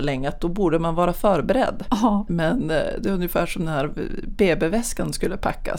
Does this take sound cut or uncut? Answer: uncut